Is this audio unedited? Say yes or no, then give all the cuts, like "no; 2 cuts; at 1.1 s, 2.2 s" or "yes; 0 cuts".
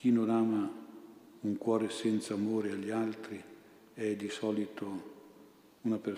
yes; 0 cuts